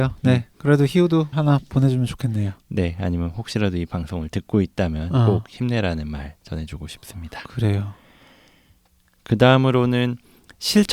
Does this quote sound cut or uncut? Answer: cut